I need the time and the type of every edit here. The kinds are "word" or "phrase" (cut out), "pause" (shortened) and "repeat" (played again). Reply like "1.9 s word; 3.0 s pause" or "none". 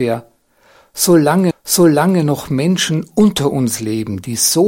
1.5 s repeat